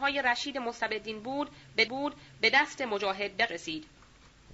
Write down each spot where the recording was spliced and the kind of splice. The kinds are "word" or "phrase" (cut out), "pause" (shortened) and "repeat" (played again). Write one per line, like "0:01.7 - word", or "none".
0:01.9 - repeat
0:03.5 - word